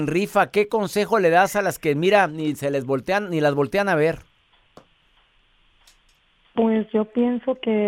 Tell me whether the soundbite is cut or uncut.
uncut